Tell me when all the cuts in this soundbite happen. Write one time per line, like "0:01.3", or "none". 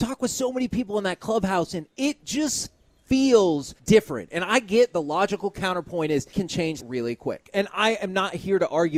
0:03.8
0:06.3
0:06.8